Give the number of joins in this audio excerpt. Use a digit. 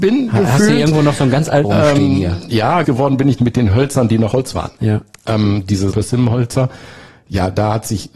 5